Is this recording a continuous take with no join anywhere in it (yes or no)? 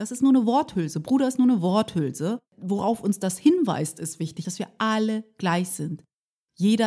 no